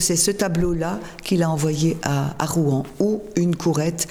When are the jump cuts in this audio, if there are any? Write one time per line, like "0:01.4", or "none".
none